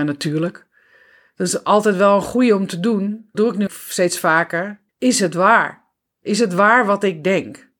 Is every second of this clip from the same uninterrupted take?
no; 3 cuts; at 3.3 s, 3.7 s, 4.9 s

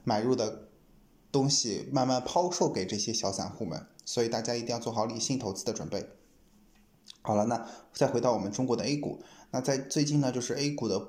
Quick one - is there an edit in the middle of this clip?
no; 0 cuts

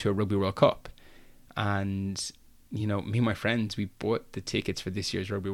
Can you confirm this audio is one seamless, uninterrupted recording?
yes; 0 cuts

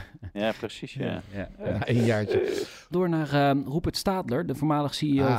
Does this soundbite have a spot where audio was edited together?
yes; 2 cuts; at 2.9 s, 4.5 s

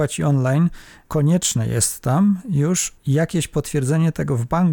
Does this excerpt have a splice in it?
no; 0 cuts

